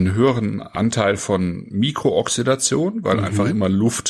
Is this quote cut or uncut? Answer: uncut